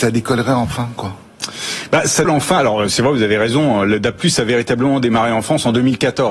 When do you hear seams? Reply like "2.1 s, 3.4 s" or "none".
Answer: 2.2 s